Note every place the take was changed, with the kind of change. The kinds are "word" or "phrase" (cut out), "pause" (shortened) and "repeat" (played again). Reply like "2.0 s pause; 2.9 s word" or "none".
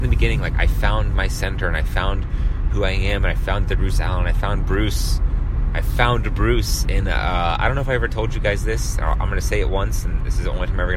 none